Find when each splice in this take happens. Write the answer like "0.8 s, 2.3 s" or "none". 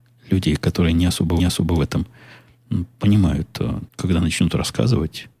1.4 s, 3.9 s